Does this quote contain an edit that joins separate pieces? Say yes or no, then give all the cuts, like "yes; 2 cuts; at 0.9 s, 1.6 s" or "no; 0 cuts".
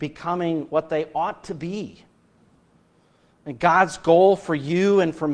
no; 0 cuts